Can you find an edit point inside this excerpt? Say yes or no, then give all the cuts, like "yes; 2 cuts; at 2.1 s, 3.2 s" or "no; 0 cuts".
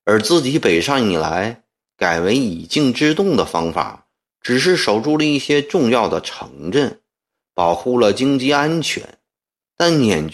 no; 0 cuts